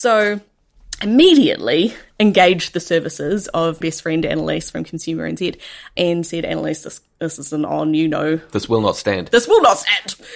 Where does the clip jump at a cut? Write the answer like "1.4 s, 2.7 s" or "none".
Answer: 3.8 s